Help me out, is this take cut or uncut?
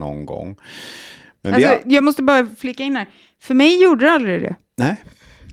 uncut